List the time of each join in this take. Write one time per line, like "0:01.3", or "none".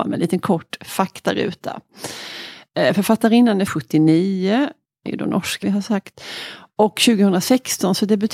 0:03.7
0:05.1
0:05.6